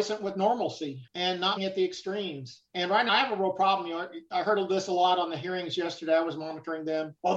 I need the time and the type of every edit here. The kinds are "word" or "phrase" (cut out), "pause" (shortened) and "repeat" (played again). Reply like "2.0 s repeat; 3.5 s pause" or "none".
1.6 s word; 3.1 s word